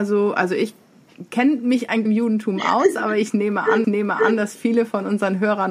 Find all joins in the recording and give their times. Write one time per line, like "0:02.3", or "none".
0:01.3
0:02.0
0:03.8